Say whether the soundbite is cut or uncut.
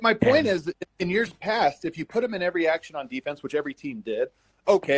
uncut